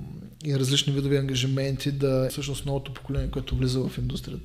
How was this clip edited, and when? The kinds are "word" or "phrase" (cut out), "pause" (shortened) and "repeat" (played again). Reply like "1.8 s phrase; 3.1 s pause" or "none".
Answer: 2.3 s word